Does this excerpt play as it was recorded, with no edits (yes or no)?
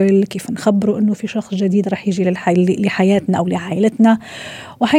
yes